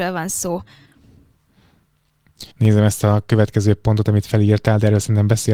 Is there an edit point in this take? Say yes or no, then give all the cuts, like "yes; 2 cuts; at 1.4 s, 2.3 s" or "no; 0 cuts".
yes; 1 cut; at 2.5 s